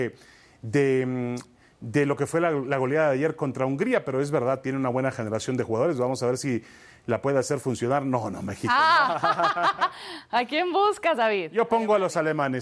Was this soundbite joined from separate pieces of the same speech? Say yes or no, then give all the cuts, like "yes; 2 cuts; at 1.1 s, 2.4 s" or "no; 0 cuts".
no; 0 cuts